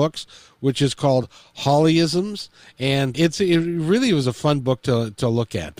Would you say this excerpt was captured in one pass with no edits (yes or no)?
no